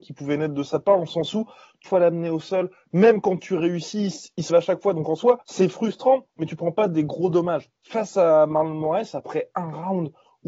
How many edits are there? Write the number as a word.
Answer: three